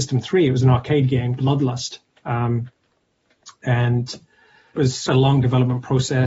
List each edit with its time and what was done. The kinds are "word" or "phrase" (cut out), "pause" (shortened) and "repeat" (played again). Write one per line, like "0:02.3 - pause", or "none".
0:01.4 - word
0:04.8 - word
0:05.1 - word